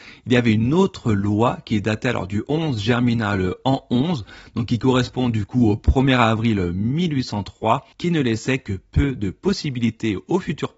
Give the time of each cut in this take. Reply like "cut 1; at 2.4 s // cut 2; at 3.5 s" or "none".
cut 1; at 7.9 s